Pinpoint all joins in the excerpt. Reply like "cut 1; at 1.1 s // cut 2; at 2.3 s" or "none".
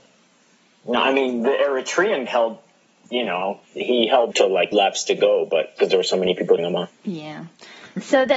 cut 1; at 2.3 s // cut 2; at 3.6 s // cut 3; at 4.3 s // cut 4; at 4.7 s // cut 5; at 5.8 s // cut 6; at 6.6 s // cut 7; at 6.9 s